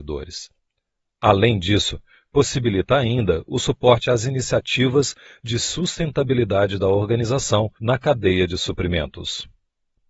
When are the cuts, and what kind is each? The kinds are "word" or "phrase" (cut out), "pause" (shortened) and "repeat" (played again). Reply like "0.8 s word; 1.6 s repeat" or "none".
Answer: 7.8 s pause